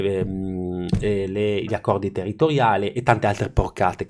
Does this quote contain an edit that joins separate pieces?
no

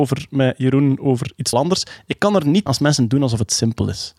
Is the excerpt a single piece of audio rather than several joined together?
no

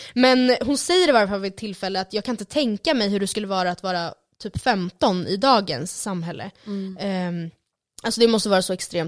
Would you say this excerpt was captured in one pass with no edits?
yes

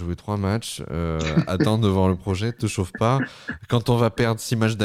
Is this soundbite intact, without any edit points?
yes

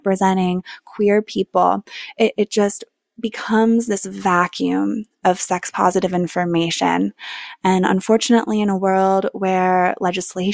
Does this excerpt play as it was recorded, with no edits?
yes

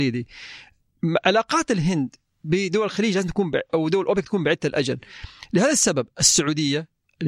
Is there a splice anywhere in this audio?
no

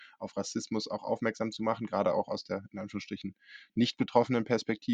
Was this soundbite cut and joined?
no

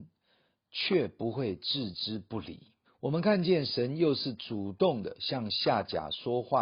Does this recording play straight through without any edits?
no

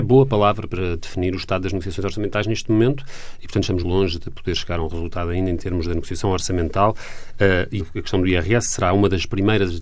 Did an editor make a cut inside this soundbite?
yes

